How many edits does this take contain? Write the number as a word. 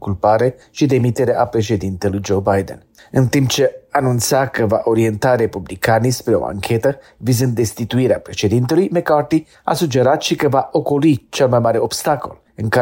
zero